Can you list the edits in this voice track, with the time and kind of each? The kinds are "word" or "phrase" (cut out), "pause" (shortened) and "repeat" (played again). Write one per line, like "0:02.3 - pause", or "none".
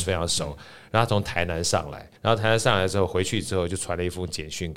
0:02.2 - pause